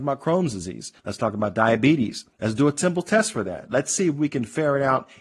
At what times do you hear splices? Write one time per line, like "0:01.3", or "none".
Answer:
0:01.0
0:02.3